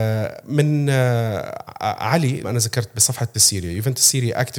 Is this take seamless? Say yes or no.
no